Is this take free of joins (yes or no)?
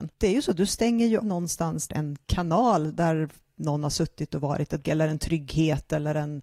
no